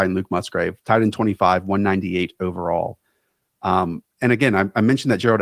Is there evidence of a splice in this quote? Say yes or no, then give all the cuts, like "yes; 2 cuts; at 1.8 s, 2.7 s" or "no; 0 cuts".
yes; 1 cut; at 4.1 s